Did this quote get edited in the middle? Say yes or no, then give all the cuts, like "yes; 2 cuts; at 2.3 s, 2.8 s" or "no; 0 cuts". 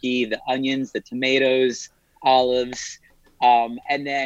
no; 0 cuts